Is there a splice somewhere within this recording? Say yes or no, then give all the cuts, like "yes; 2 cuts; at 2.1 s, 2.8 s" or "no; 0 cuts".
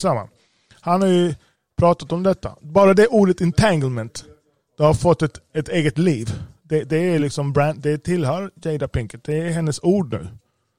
no; 0 cuts